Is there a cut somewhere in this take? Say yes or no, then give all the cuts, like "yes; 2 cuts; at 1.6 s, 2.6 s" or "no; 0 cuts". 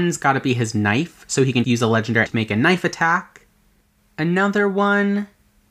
yes; 2 cuts; at 1.6 s, 2.3 s